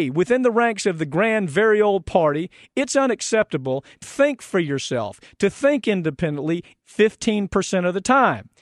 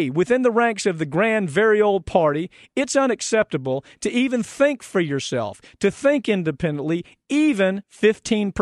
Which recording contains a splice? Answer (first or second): first